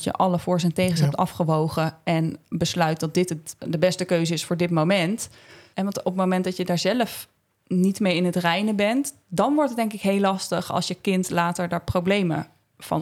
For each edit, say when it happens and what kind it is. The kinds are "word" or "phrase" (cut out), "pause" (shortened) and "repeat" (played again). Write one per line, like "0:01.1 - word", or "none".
0:03.6 - word